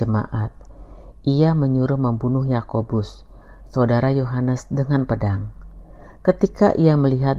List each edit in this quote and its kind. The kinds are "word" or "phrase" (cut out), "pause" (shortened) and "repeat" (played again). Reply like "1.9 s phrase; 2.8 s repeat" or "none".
none